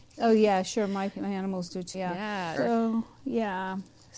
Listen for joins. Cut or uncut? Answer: cut